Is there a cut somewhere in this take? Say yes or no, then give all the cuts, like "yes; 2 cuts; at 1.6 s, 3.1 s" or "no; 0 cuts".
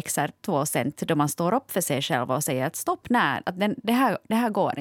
no; 0 cuts